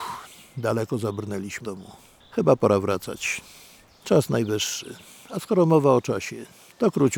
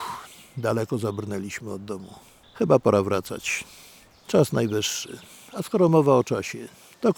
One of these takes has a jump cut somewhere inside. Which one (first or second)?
first